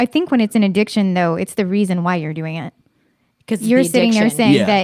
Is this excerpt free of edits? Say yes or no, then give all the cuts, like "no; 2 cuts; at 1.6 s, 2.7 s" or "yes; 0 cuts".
yes; 0 cuts